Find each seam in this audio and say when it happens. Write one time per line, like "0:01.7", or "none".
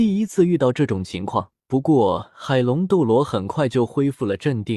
0:01.6